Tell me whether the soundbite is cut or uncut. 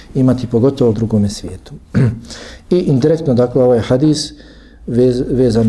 cut